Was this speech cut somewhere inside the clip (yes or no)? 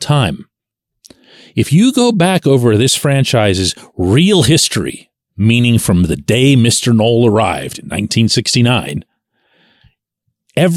no